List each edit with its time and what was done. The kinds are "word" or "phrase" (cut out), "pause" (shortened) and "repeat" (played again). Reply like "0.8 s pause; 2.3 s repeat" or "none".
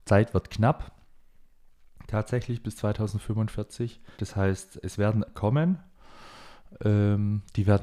4.1 s pause; 4.8 s word; 5.3 s word